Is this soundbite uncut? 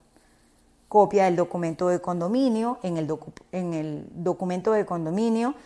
yes; 0 cuts

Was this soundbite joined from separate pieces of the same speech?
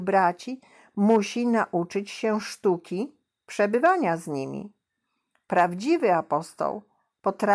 no; 0 cuts

